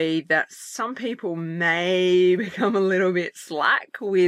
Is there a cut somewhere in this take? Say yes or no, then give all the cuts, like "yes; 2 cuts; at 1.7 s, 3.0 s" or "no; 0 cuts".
no; 0 cuts